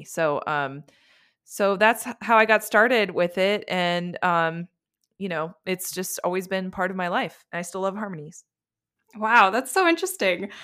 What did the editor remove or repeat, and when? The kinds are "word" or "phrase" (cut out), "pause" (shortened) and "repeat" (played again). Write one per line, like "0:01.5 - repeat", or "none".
none